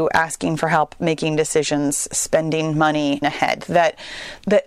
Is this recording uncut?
no; 1 cut; at 3.2 s

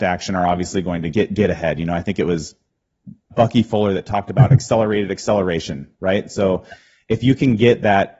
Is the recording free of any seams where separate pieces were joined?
no; 2 cuts; at 1.1 s, 3.3 s

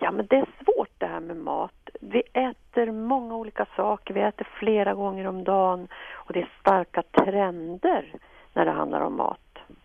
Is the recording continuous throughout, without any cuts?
yes; 0 cuts

